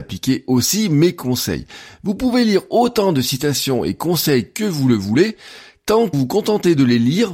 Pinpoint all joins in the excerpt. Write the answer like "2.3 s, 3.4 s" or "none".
6.1 s